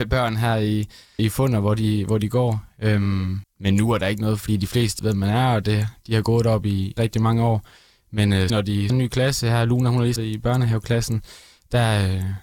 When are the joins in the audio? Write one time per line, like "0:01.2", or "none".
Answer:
0:01.2
0:03.4
0:05.0
0:07.0
0:08.5
0:08.9
0:10.2